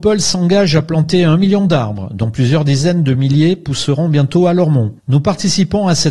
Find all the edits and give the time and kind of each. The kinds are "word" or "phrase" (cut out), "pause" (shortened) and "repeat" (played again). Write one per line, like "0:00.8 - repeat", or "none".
none